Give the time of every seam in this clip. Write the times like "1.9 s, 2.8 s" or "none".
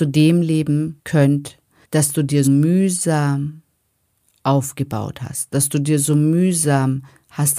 1.8 s, 2.4 s